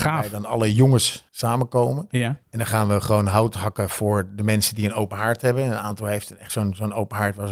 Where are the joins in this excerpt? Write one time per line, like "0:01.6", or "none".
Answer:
0:01.3
0:02.4